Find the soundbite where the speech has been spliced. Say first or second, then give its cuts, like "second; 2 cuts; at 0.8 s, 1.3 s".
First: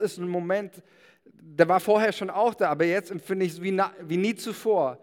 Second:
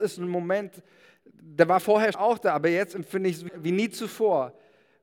second; 2 cuts; at 2.1 s, 3.5 s